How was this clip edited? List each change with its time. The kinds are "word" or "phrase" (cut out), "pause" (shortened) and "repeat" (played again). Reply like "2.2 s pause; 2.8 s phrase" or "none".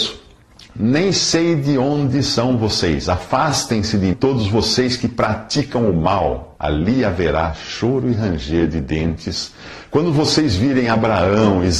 4.1 s word; 6.6 s pause